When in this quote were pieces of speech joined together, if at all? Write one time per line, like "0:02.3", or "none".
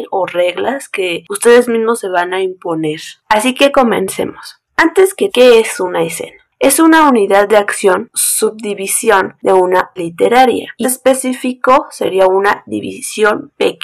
0:05.3
0:08.1
0:10.0
0:10.8